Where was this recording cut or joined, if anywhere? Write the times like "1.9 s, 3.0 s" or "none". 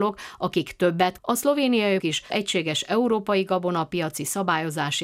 1.2 s, 2.0 s, 2.3 s